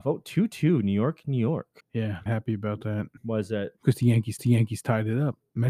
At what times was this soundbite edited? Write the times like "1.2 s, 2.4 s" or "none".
1.8 s, 2.3 s, 3.2 s, 3.8 s, 4.4 s